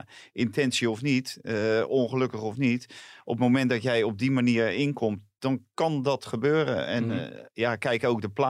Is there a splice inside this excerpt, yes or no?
no